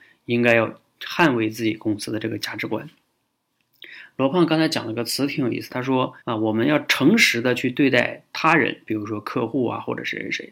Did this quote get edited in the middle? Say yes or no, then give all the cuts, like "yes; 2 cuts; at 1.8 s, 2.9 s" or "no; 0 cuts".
yes; 2 cuts; at 5.7 s, 6.2 s